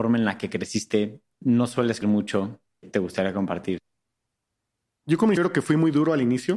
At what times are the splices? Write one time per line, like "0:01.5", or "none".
0:01.3
0:02.0
0:02.8
0:05.4